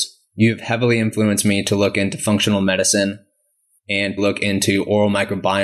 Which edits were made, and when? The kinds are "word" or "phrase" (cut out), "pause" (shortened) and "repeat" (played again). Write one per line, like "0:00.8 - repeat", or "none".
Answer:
0:04.2 - word